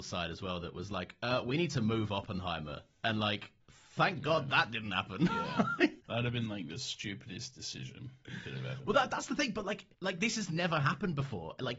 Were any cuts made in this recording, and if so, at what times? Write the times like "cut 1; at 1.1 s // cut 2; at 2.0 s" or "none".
cut 1; at 3.6 s // cut 2; at 6.0 s